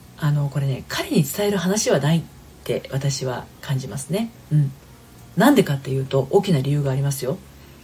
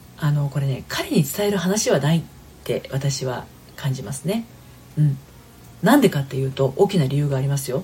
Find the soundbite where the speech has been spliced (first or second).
first